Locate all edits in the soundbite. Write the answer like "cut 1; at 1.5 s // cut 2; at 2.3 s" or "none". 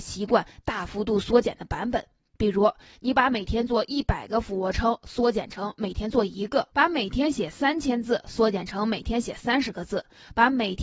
cut 1; at 6.7 s